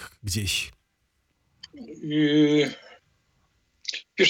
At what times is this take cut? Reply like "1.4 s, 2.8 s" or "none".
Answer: none